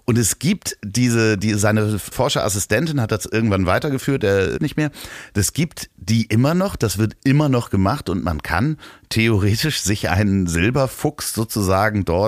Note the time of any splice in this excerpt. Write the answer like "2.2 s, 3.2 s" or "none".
2.1 s, 4.6 s